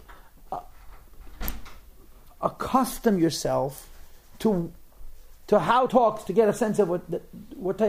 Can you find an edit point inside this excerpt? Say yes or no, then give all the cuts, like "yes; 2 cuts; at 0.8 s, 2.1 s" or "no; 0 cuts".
yes; 1 cut; at 5.9 s